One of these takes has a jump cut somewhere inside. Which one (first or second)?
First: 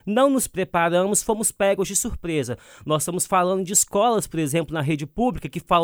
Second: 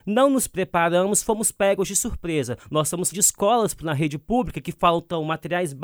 second